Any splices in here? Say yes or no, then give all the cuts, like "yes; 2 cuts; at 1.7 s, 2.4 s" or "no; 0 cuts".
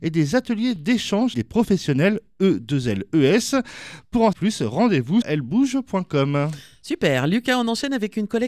yes; 3 cuts; at 1.3 s, 4.3 s, 5.2 s